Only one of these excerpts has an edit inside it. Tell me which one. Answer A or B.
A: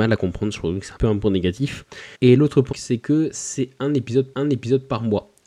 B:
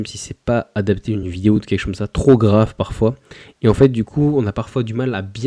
A